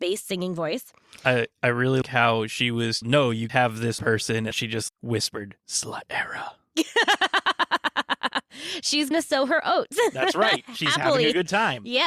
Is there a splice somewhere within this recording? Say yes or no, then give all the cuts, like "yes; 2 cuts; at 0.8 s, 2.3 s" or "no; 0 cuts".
yes; 7 cuts; at 2.0 s, 3.0 s, 3.5 s, 4.0 s, 4.5 s, 4.9 s, 9.1 s